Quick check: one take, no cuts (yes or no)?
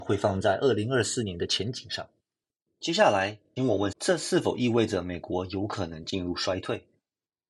no